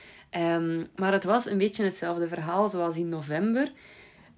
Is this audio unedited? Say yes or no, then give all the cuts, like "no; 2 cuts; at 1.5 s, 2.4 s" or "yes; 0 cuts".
yes; 0 cuts